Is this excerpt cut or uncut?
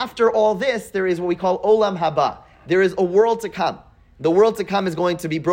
uncut